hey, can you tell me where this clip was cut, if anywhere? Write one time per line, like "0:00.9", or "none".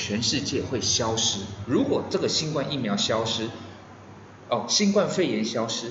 none